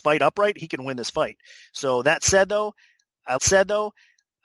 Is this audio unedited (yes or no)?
no